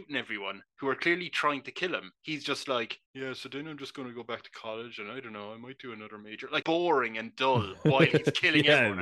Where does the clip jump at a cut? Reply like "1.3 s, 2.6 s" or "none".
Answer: 2.1 s, 3.1 s, 6.6 s